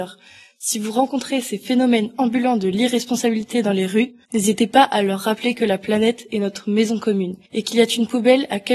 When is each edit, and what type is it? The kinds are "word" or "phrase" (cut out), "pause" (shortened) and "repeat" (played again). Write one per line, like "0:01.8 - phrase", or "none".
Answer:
0:04.2 - pause
0:07.4 - pause